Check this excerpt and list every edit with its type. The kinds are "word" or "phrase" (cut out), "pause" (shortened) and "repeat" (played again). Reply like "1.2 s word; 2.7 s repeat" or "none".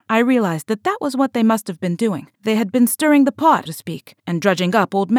2.3 s pause; 3.7 s word; 4.2 s pause